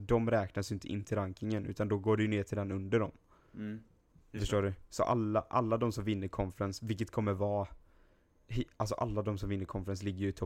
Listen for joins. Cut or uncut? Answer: uncut